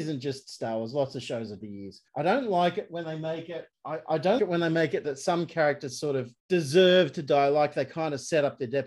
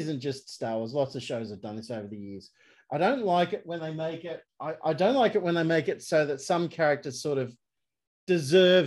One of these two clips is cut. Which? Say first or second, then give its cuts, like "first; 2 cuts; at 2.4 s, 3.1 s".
first; 5 cuts; at 1.6 s, 2.1 s, 4.4 s, 5.0 s, 6.4 s